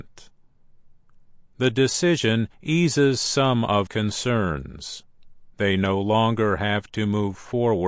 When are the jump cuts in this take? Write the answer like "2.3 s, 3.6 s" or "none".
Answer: 2.5 s, 3.9 s, 5.5 s